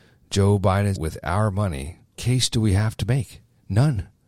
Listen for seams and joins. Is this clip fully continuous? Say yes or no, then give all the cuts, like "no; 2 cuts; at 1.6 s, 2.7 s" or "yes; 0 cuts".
no; 2 cuts; at 1.0 s, 2.1 s